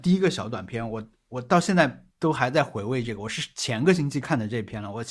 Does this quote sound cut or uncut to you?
cut